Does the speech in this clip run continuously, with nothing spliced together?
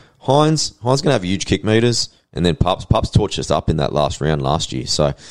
yes; 0 cuts

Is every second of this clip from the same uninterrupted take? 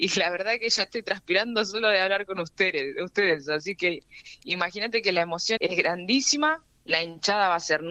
no; 1 cut; at 5.6 s

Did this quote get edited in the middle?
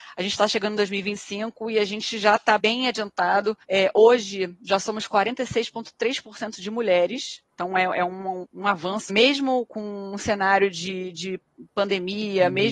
yes; 6 cuts; at 2.6 s, 3.6 s, 7.5 s, 8.4 s, 9.1 s, 9.7 s

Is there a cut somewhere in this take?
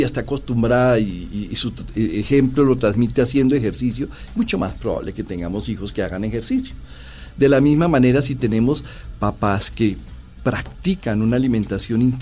no; 0 cuts

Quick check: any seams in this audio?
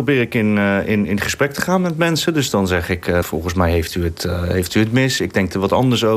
yes; 1 cut; at 3.2 s

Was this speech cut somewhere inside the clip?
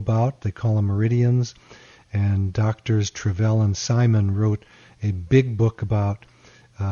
no; 0 cuts

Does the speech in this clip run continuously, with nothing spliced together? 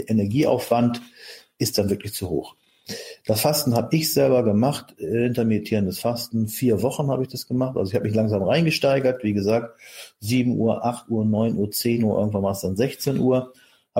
yes; 0 cuts

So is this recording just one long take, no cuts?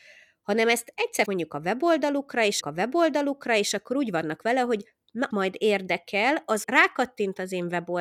no; 4 cuts; at 1.3 s, 2.6 s, 5.3 s, 6.6 s

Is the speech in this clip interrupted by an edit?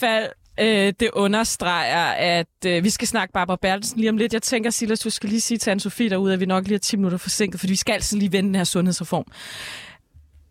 no; 0 cuts

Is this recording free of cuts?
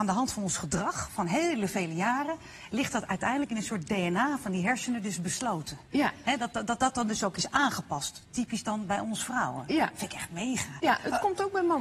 yes; 0 cuts

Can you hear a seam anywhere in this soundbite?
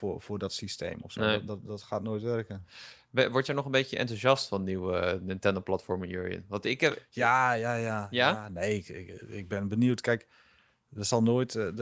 no; 0 cuts

